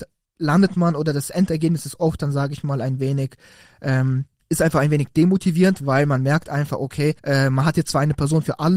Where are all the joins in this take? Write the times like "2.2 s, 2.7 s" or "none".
4.4 s, 7.2 s